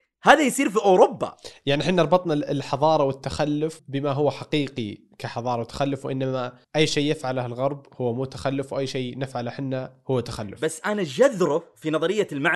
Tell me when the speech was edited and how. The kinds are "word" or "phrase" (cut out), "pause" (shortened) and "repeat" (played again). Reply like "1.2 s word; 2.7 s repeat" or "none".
3.8 s word; 6.6 s pause